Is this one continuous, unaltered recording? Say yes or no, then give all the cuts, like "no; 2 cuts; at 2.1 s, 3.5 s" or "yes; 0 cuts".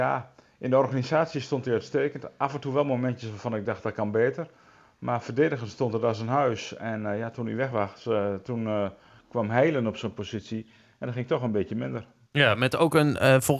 yes; 0 cuts